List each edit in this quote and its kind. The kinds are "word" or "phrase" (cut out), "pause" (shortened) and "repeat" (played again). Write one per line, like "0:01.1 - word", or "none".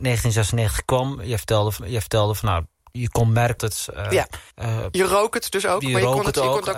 0:01.8 - repeat
0:03.6 - word
0:04.5 - pause